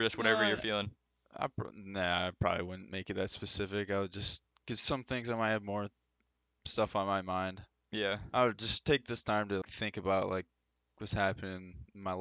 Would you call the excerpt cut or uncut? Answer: cut